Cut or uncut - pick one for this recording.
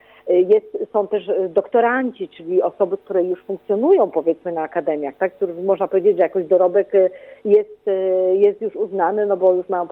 uncut